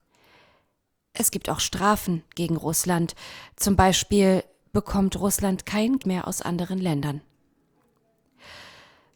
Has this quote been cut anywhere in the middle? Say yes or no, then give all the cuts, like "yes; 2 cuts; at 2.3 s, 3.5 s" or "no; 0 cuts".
yes; 1 cut; at 6.0 s